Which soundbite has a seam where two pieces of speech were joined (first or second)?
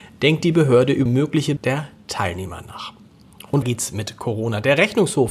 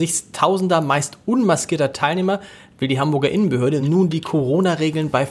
first